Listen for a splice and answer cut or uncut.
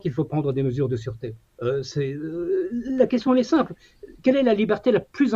uncut